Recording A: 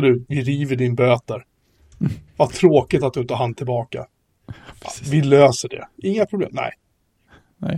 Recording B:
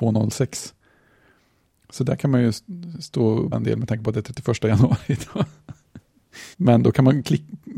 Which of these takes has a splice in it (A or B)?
B